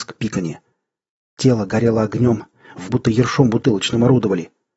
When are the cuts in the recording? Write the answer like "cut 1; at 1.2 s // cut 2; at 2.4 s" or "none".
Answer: cut 1; at 2.9 s